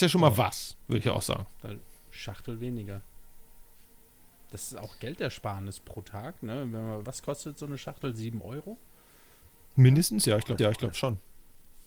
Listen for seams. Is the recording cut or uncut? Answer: cut